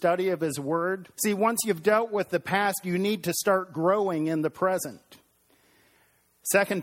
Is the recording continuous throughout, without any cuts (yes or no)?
no